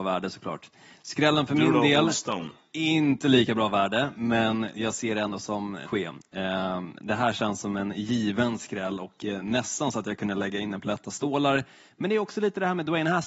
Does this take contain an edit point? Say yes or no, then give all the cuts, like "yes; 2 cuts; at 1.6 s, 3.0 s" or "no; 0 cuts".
yes; 1 cut; at 5.9 s